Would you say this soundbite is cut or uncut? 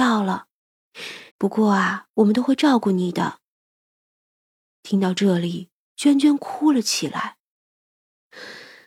cut